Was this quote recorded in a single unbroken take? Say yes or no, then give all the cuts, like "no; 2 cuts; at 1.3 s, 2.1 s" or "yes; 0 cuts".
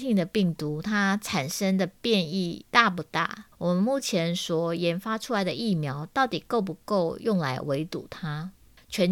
no; 1 cut; at 3.5 s